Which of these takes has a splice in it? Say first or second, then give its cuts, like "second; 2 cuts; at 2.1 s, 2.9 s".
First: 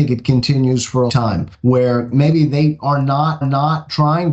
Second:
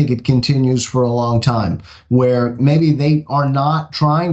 first; 3 cuts; at 1.1 s, 1.5 s, 3.4 s